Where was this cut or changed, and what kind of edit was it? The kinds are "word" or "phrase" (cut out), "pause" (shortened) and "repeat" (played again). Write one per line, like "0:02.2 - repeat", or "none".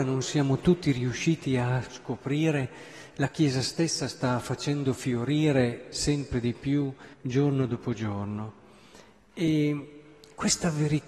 0:07.1 - pause